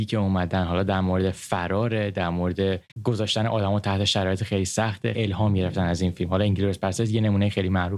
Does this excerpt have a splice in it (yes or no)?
yes